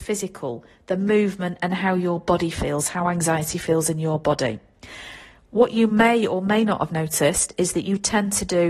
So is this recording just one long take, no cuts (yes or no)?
yes